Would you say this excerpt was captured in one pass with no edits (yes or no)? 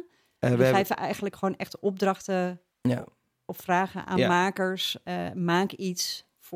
yes